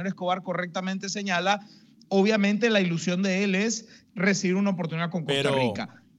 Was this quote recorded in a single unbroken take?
yes; 0 cuts

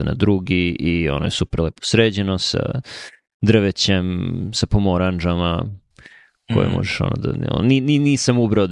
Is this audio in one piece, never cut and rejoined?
yes; 0 cuts

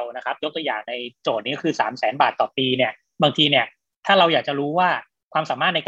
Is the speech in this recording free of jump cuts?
yes; 0 cuts

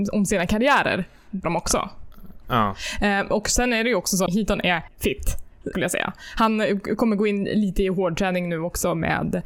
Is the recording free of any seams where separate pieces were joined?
no; 4 cuts; at 1.4 s, 4.3 s, 4.9 s, 5.7 s

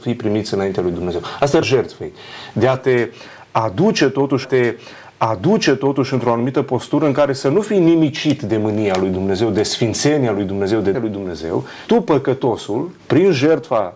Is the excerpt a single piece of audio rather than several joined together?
no; 5 cuts; at 1.6 s, 4.4 s, 10.9 s, 11.9 s, 13.0 s

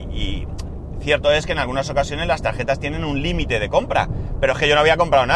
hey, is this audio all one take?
yes; 0 cuts

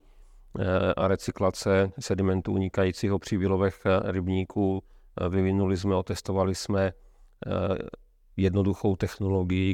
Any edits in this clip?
no; 0 cuts

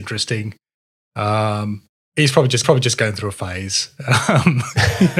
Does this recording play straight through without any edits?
no; 2 cuts; at 2.0 s, 2.6 s

